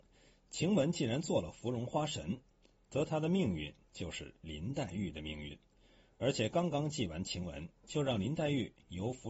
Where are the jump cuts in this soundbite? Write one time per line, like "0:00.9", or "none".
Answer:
0:07.8